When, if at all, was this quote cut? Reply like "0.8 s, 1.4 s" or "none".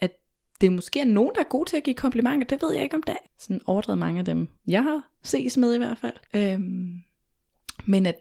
3.2 s, 4.6 s, 6.2 s